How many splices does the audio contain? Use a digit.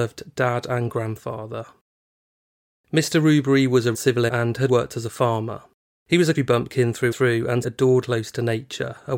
7